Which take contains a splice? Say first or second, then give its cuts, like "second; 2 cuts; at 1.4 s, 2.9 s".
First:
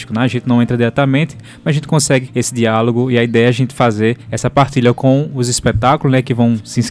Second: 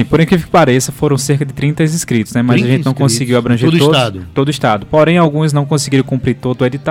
first; 2 cuts; at 2.3 s, 4.2 s